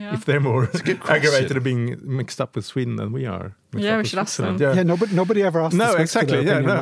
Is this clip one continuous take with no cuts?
yes; 0 cuts

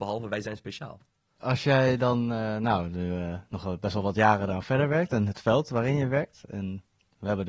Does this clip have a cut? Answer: no; 0 cuts

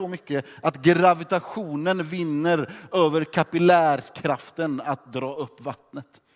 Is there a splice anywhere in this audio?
no; 0 cuts

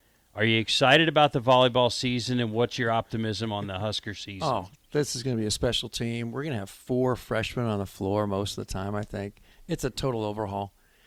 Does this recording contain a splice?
no; 0 cuts

